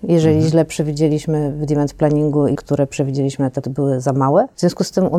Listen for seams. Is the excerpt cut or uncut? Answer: cut